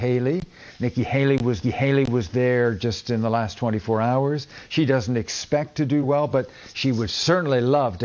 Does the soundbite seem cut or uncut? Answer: cut